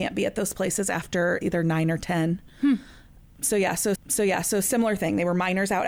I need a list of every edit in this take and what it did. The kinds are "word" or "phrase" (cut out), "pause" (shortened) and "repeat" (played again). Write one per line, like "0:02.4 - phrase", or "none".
0:01.4 - word
0:03.9 - repeat